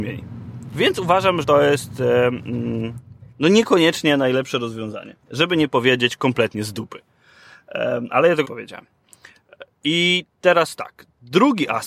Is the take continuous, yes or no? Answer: no